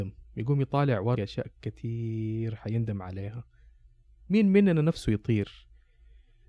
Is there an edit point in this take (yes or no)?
yes